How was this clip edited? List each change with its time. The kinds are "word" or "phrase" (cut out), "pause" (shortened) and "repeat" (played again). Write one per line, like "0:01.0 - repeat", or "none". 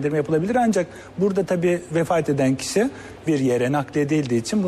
0:01.9 - word
0:03.3 - word